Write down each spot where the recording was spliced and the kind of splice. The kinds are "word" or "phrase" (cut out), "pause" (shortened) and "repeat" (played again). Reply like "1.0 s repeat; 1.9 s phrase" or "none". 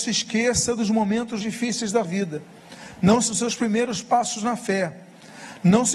1.4 s word; 2.0 s word; 3.3 s word